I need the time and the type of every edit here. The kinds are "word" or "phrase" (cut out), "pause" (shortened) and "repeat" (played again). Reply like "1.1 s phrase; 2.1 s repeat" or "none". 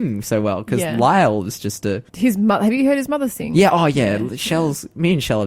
2.1 s pause